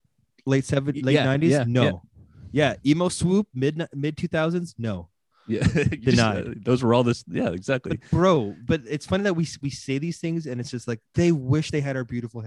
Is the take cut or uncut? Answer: uncut